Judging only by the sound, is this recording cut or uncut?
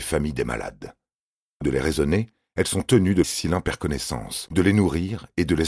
cut